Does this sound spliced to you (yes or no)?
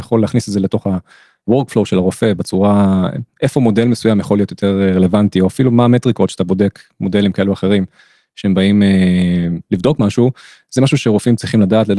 no